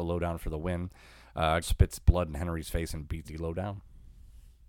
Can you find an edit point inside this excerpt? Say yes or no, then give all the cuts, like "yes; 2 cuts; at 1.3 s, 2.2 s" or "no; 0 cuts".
yes; 2 cuts; at 1.6 s, 3.2 s